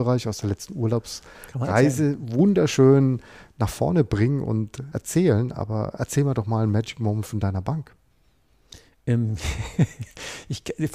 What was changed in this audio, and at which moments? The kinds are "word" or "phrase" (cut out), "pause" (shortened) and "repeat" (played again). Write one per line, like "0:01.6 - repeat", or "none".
0:04.9 - word

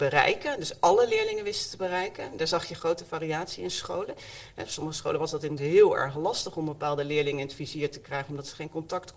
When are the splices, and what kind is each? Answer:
0:05.6 - word

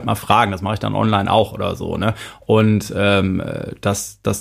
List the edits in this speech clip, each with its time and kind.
none

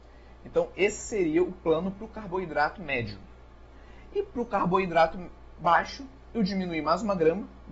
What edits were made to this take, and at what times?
none

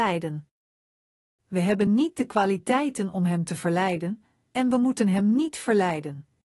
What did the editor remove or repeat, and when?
none

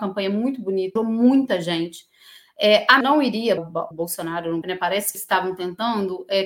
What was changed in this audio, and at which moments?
0:01.0 - word
0:03.0 - word
0:03.6 - word
0:03.9 - word
0:04.6 - word
0:05.1 - word

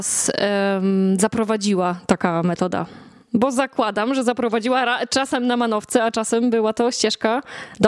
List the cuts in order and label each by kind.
none

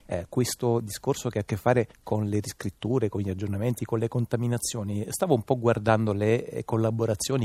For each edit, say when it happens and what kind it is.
0:01.9 - pause

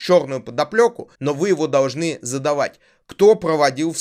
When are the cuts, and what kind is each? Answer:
0:01.1 - pause

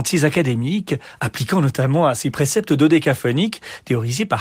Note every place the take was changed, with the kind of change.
0:02.3 - phrase

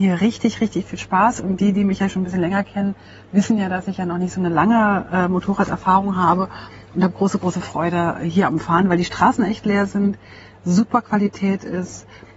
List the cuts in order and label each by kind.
none

